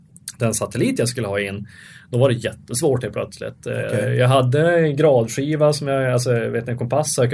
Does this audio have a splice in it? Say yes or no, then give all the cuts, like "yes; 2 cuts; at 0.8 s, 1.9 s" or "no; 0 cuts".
no; 0 cuts